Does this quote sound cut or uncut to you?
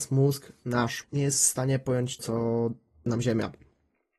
cut